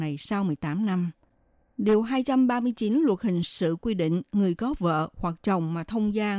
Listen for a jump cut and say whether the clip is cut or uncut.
uncut